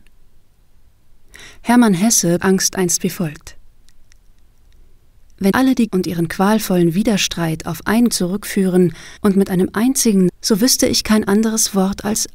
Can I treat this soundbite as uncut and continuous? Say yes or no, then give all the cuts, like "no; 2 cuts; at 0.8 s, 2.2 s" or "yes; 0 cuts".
no; 6 cuts; at 2.4 s, 5.5 s, 5.9 s, 8.1 s, 9.2 s, 10.3 s